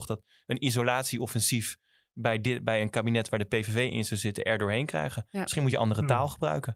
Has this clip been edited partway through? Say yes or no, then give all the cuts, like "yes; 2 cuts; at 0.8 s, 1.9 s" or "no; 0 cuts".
no; 0 cuts